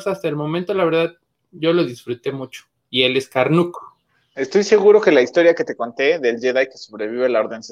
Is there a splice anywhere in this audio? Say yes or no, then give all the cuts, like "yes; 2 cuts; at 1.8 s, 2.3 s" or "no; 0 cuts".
no; 0 cuts